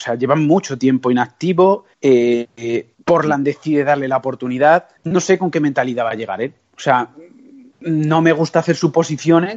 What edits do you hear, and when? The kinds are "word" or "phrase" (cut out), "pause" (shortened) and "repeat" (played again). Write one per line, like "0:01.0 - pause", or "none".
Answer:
0:01.9 - pause
0:02.9 - pause
0:05.0 - pause